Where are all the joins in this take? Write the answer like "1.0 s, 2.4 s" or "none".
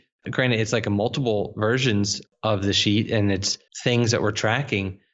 3.7 s